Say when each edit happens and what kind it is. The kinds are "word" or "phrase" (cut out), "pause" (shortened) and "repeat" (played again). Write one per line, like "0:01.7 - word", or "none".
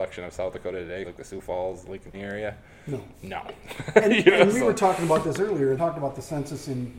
0:01.0 - word
0:02.1 - word
0:05.8 - phrase